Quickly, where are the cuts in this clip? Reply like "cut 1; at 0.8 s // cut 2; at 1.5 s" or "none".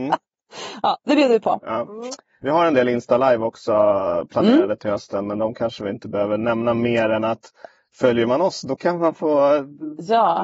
none